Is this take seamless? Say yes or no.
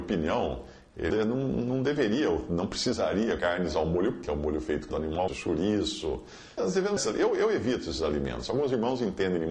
no